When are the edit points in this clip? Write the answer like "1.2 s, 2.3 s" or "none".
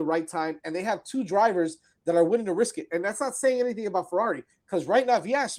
none